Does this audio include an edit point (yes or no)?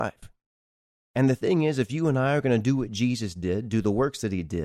no